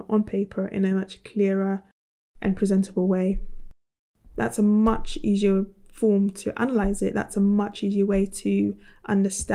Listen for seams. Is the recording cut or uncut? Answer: uncut